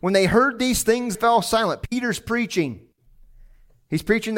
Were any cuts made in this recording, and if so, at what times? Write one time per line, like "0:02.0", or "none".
0:01.1